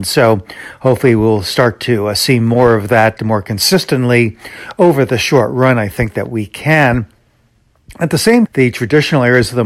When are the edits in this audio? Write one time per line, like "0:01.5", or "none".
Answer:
0:08.5